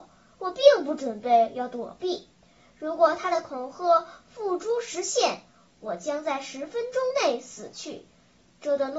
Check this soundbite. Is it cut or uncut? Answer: uncut